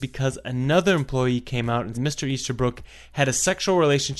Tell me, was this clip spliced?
yes; 1 cut; at 1.9 s

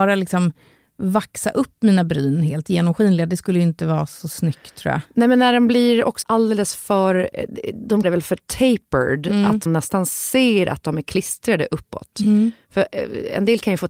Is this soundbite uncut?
no; 3 cuts; at 6.2 s, 8.0 s, 9.7 s

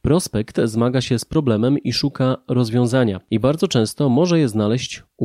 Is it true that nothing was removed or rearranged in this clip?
yes; 0 cuts

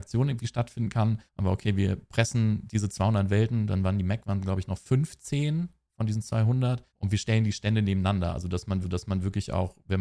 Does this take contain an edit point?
yes; 3 cuts; at 1.3 s, 6.9 s, 8.8 s

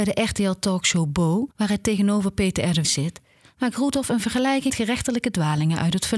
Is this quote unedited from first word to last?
no; 3 cuts; at 1.5 s, 2.8 s, 4.7 s

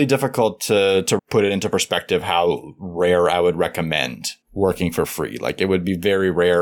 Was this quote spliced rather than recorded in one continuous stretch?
yes; 2 cuts; at 1.2 s, 4.4 s

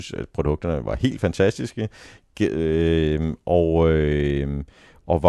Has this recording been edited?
no; 0 cuts

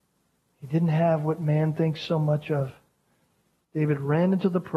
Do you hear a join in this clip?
no; 0 cuts

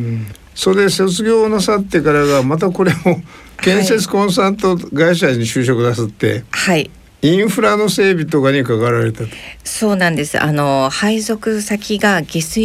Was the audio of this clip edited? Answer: no; 0 cuts

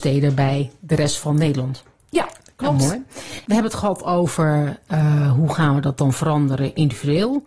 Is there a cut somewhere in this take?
no; 0 cuts

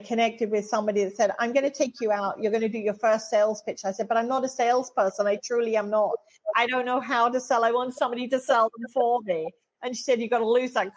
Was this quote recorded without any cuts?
yes; 0 cuts

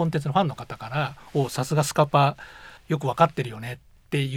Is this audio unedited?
no; 1 cut; at 2.8 s

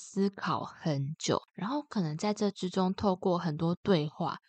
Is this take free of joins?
no; 1 cut; at 1.5 s

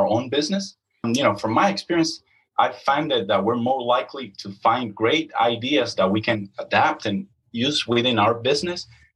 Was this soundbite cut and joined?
no; 0 cuts

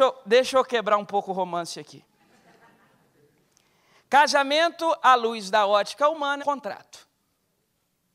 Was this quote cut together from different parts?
yes; 1 cut; at 6.4 s

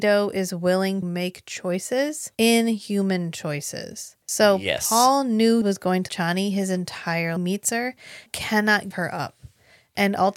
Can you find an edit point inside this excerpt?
yes; 8 cuts; at 1.0 s, 2.3 s, 4.2 s, 5.6 s, 6.1 s, 7.4 s, 8.3 s, 8.9 s

